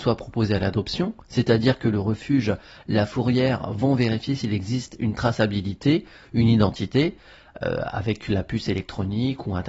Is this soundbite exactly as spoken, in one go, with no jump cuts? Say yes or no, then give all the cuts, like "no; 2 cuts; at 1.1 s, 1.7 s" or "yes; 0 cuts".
yes; 0 cuts